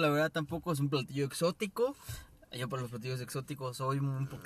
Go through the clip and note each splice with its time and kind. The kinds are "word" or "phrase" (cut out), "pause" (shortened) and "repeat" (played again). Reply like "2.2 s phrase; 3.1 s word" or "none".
none